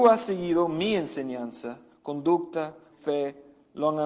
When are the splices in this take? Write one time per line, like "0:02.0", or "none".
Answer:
0:02.9